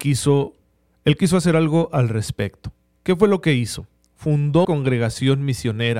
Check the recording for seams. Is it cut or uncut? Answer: cut